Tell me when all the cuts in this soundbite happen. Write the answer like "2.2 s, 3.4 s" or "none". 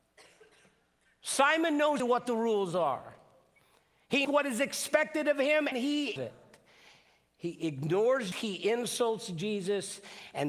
2.0 s, 4.2 s, 5.7 s, 6.2 s, 8.3 s